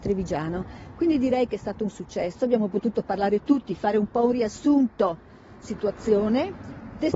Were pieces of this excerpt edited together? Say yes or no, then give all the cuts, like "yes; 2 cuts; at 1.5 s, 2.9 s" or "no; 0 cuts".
yes; 1 cut; at 5.6 s